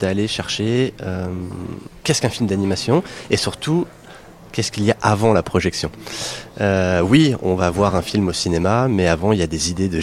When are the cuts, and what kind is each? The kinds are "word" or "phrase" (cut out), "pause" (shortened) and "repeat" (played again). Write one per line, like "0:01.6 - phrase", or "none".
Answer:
none